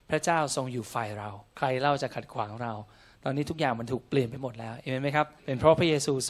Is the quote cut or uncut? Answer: cut